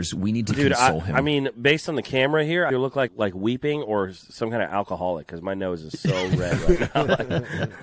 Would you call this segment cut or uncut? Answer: cut